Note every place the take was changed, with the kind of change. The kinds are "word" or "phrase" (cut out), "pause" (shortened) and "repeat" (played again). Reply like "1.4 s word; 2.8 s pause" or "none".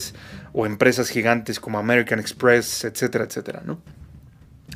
none